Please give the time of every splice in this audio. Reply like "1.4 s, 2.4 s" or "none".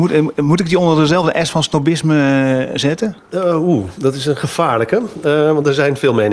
2.7 s